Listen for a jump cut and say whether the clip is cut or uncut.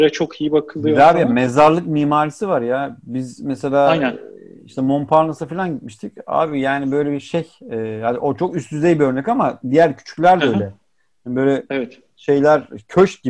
uncut